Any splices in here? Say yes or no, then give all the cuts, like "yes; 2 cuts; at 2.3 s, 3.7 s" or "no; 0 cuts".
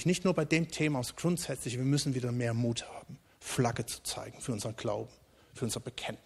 no; 0 cuts